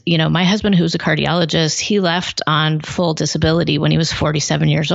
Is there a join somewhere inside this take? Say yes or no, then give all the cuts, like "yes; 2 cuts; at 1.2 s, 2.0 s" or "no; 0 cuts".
no; 0 cuts